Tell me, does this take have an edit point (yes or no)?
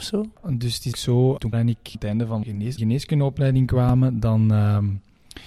yes